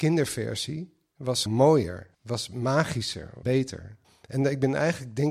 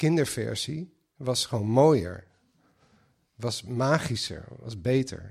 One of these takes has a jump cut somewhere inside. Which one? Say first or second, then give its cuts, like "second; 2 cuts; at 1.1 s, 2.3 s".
first; 4 cuts; at 1.5 s, 2.1 s, 3.4 s, 4.0 s